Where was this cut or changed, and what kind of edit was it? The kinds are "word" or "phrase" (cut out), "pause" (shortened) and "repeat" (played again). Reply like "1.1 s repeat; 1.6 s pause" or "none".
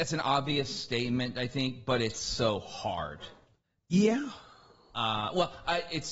none

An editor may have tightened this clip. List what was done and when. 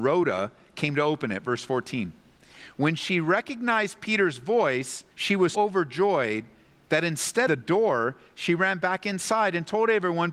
5.1 s pause; 5.5 s word; 7.5 s phrase

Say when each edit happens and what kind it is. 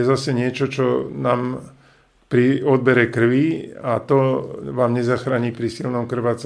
none

